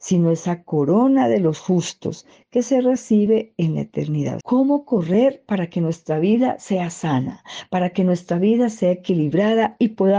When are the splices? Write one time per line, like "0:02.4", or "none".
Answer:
0:04.4